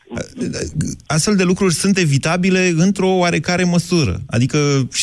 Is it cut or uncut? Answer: uncut